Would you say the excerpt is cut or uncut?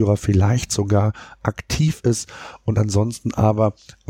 uncut